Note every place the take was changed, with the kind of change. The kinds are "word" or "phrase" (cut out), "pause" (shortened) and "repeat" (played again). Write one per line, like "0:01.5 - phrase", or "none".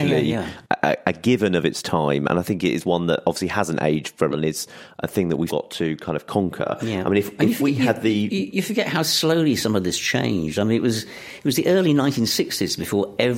0:04.3 - word
0:05.5 - word
0:07.4 - word